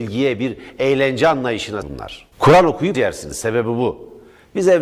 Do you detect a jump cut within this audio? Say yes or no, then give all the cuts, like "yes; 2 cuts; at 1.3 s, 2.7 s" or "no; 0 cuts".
yes; 3 cuts; at 1.8 s, 2.3 s, 2.9 s